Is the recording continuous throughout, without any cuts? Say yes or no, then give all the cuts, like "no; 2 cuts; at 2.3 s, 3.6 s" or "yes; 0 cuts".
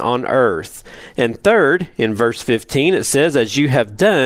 yes; 0 cuts